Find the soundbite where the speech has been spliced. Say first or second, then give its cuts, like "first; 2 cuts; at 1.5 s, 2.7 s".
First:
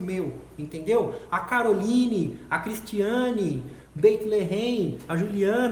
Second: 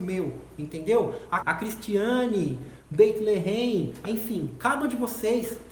second; 3 cuts; at 1.4 s, 4.1 s, 4.8 s